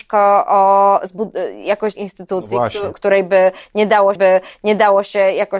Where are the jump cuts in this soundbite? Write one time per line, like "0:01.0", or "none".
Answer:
0:02.0
0:04.2